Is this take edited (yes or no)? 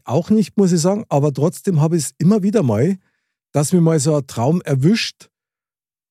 no